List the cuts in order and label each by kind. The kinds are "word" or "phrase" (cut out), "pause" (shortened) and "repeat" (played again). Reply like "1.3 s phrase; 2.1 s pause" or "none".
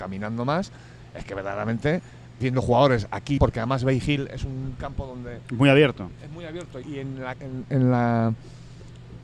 2.4 s word; 3.4 s word; 6.8 s word; 7.3 s word